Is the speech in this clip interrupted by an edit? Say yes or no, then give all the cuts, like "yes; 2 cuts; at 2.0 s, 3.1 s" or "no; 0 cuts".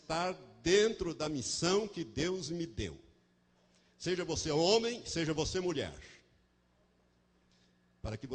no; 0 cuts